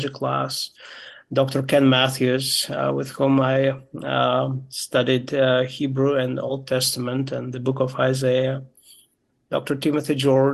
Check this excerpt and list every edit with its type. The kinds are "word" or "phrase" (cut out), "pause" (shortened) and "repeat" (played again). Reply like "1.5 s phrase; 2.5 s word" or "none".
none